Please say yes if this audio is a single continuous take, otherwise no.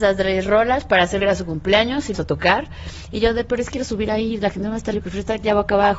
no